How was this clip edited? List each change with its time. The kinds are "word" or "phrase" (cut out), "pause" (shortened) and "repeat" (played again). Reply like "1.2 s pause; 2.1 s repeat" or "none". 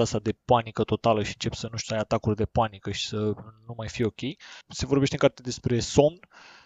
none